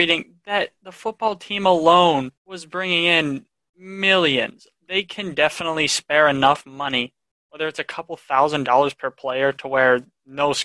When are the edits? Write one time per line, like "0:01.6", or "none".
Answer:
0:02.4

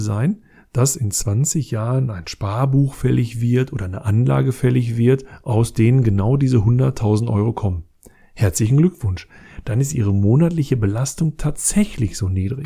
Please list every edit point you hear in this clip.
none

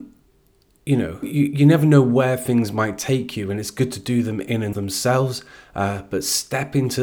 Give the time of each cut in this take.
0:01.2
0:04.7

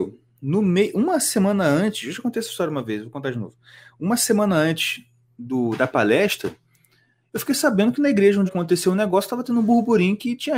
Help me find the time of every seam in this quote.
0:08.5

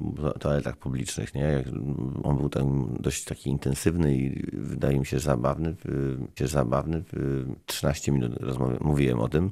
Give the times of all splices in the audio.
0:06.4

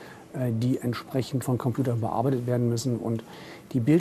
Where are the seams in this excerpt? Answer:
0:01.4

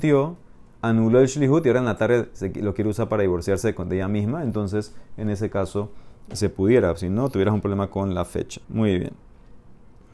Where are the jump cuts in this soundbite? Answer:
0:08.6

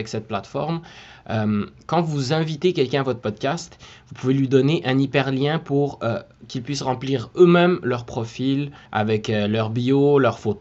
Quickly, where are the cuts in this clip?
0:08.9

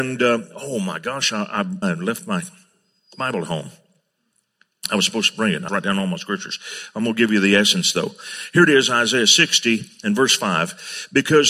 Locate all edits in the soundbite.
0:01.8
0:05.7

